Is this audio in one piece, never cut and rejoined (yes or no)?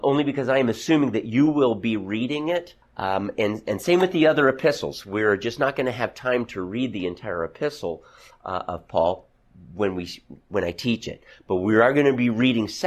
no